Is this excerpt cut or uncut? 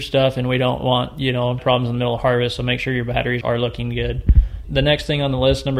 cut